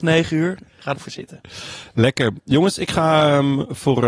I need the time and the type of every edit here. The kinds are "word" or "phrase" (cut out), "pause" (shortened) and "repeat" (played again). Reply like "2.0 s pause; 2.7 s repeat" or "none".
0.9 s word

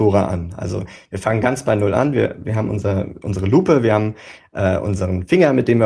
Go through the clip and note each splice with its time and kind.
none

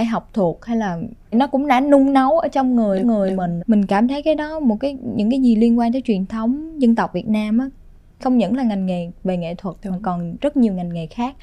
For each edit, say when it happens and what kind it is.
1.3 s word; 3.0 s repeat; 3.6 s word; 8.2 s word

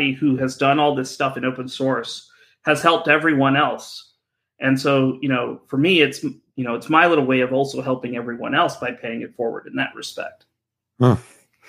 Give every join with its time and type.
none

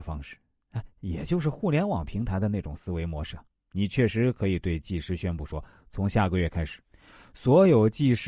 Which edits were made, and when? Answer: 3.5 s pause

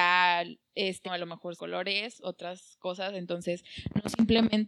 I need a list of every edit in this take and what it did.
1.0 s word; 1.6 s phrase

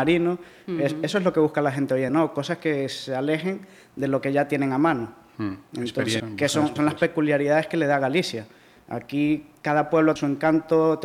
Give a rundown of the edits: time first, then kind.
2.1 s word; 6.2 s word; 6.8 s word; 10.2 s word

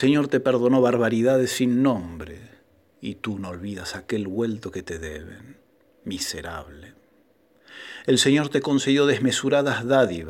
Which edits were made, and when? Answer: none

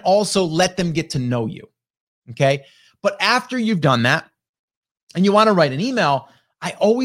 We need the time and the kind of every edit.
none

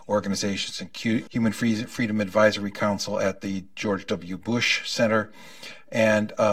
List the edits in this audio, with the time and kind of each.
1.3 s word

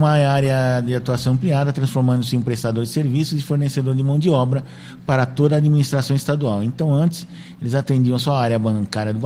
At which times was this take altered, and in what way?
none

